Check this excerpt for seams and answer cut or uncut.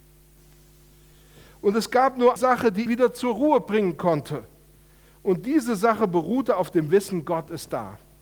cut